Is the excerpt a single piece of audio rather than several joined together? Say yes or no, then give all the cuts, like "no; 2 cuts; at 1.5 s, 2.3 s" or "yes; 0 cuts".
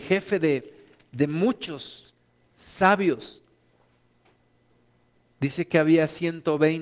yes; 0 cuts